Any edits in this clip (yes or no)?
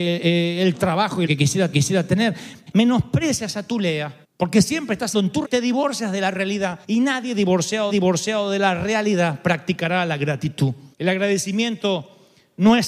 yes